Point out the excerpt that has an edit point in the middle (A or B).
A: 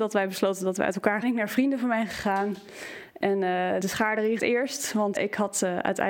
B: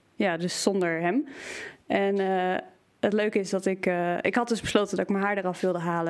A